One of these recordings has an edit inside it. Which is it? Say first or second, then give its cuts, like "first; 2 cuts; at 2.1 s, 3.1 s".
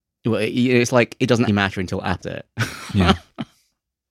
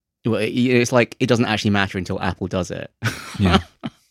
first; 2 cuts; at 1.5 s, 2.2 s